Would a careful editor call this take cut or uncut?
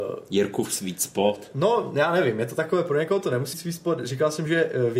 cut